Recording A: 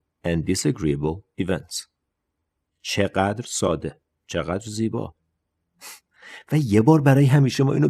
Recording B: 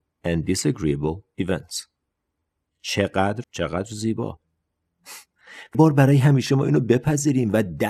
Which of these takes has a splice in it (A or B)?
B